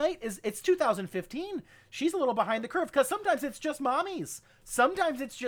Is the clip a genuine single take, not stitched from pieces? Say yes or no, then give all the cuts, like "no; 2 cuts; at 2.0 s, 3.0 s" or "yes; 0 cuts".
yes; 0 cuts